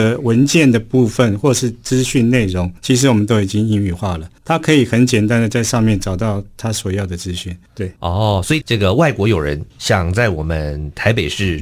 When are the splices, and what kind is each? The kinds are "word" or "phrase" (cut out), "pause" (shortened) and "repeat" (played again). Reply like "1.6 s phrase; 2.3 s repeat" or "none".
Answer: 2.8 s pause; 4.4 s pause; 8.0 s pause; 9.7 s pause

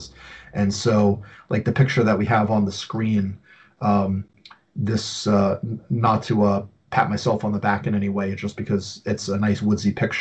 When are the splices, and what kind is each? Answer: none

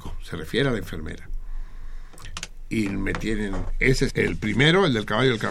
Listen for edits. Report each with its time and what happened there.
4.1 s word

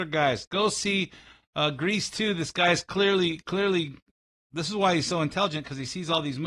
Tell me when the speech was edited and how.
none

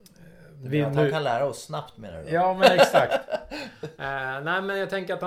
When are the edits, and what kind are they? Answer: none

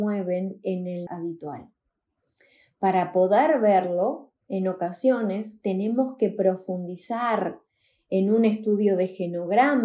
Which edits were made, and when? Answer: 1.1 s phrase

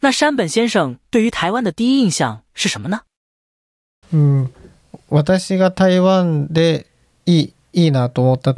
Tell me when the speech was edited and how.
none

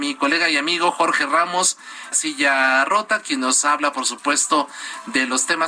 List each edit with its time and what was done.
2.1 s phrase

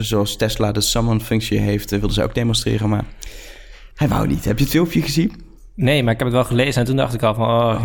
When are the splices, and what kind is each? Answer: 3.9 s pause

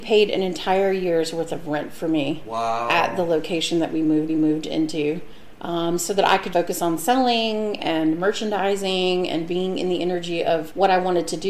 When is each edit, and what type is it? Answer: 4.3 s repeat; 6.5 s word

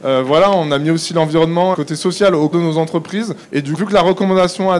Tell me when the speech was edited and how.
1.7 s phrase; 2.5 s word; 3.4 s pause; 3.8 s word

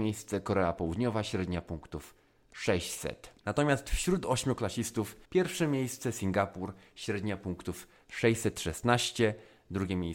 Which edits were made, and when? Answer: 3.4 s pause; 5.2 s pause

